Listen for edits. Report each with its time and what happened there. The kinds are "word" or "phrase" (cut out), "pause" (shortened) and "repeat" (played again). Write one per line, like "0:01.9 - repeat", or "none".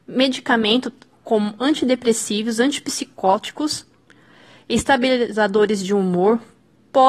none